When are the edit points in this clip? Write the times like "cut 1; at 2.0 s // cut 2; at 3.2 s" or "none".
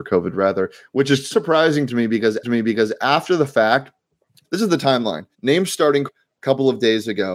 cut 1; at 1.3 s // cut 2; at 2.4 s // cut 3; at 4.4 s // cut 4; at 5.3 s // cut 5; at 6.1 s